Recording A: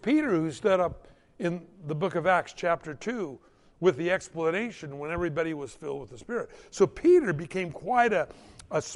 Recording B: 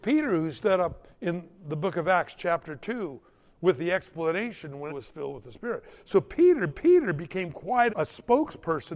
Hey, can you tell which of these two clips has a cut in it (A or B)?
B